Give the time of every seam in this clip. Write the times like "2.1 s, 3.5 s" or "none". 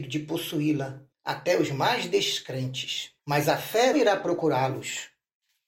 1.1 s, 3.2 s, 3.9 s